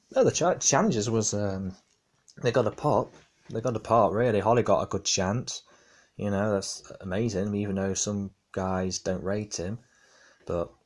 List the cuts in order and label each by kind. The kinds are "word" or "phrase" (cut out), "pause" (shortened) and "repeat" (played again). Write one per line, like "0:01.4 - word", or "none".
none